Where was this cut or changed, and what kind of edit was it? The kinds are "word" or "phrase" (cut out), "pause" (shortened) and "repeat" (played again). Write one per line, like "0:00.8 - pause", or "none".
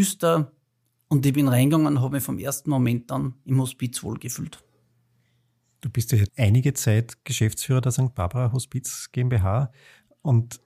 0:06.3 - word